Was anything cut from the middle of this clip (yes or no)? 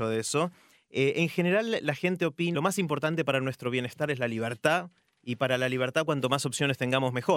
yes